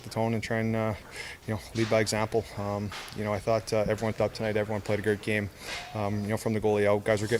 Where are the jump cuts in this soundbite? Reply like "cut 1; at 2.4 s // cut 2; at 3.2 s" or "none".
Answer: cut 1; at 4.1 s